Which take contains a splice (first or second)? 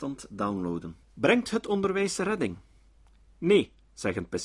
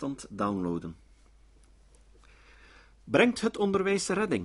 first